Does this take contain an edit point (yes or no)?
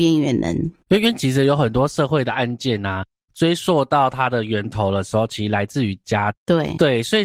no